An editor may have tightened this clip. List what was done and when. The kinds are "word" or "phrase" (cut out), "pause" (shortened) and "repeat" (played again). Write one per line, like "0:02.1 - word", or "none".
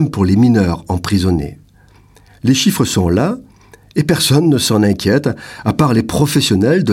none